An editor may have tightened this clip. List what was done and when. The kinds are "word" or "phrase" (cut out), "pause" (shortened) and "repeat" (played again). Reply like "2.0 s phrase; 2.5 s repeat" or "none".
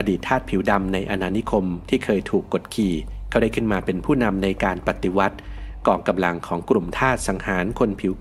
none